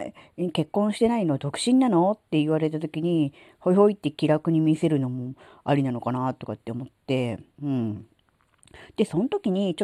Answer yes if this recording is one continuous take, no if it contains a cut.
yes